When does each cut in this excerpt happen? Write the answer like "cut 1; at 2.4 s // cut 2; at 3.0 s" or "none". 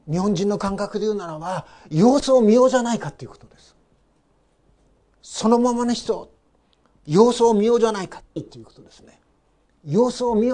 cut 1; at 8.4 s